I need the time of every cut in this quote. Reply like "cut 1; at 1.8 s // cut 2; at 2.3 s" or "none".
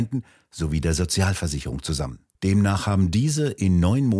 cut 1; at 2.3 s